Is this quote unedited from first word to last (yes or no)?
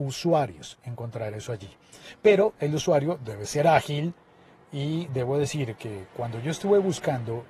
yes